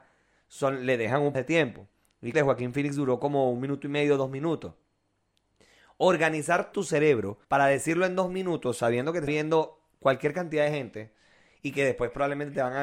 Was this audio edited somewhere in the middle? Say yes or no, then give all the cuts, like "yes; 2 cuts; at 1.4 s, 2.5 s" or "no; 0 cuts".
yes; 5 cuts; at 1.3 s, 2.3 s, 6.7 s, 7.4 s, 9.3 s